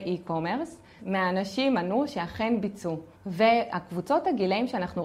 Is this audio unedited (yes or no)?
no